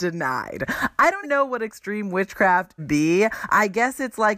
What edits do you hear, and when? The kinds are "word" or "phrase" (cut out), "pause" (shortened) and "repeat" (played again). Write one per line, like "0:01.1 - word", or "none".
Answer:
0:01.2 - word
0:02.8 - phrase